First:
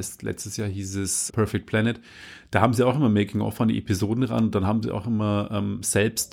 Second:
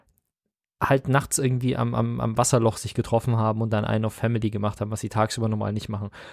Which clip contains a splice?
first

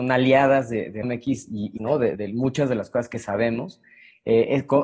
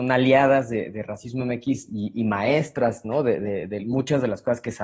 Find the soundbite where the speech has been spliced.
first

